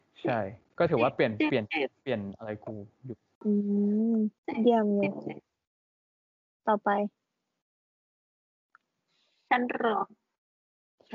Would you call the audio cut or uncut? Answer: cut